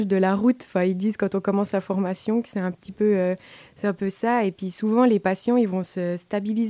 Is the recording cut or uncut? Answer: uncut